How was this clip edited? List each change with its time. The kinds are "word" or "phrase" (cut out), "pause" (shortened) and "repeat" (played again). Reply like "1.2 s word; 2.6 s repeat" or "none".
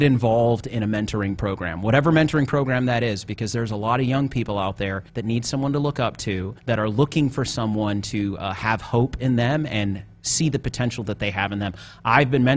5.1 s pause; 6.6 s pause